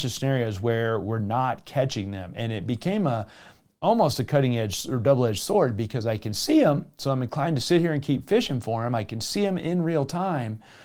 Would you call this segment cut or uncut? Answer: uncut